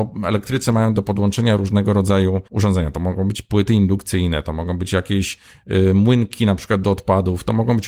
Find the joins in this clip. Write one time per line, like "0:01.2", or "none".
0:02.5

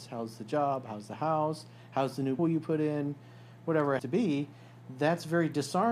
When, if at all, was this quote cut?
0:02.4
0:04.0

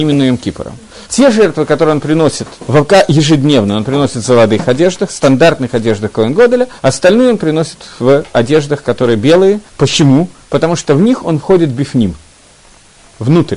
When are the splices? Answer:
0:01.0
0:02.6
0:06.8
0:09.7

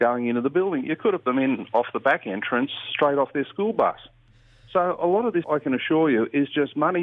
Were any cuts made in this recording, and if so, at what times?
0:01.2
0:05.4

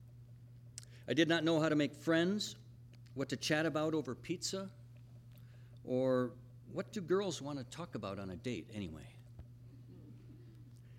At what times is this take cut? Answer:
none

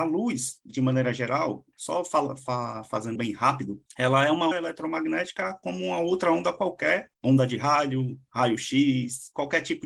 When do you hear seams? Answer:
0:03.2
0:03.9
0:04.5
0:07.1

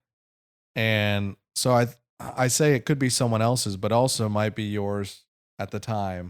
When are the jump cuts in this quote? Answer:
none

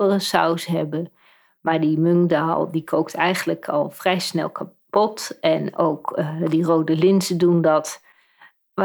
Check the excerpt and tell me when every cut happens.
none

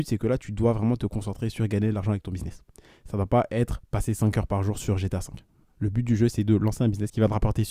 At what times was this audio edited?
none

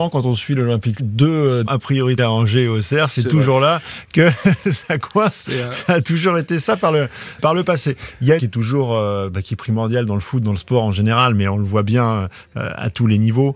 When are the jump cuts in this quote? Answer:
0:01.0
0:01.7
0:02.2
0:07.4
0:08.4

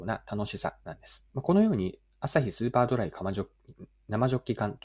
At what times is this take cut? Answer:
0:01.3

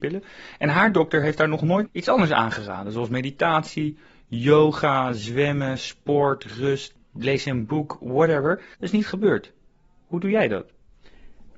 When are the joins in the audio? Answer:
0:01.9
0:08.7

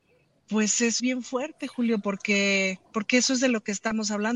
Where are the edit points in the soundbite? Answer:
0:01.0
0:02.9

